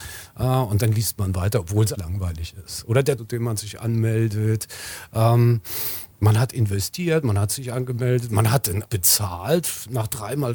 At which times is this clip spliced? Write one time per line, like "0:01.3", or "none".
0:01.9
0:03.2
0:08.8